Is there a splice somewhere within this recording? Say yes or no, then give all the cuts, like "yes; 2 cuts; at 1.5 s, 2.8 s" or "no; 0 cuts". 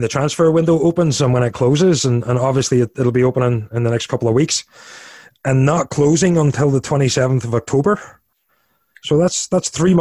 no; 0 cuts